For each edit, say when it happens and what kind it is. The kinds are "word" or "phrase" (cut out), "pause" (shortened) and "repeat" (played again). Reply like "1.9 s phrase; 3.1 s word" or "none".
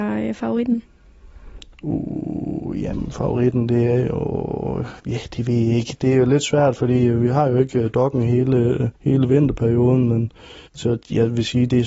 5.0 s pause; 8.9 s pause; 10.7 s pause